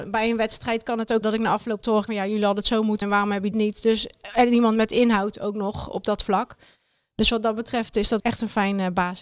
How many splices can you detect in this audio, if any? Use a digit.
5